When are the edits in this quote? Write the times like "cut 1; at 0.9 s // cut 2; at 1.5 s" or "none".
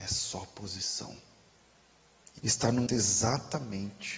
cut 1; at 2.4 s // cut 2; at 2.9 s